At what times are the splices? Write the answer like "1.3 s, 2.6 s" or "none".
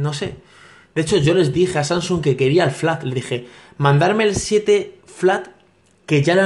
none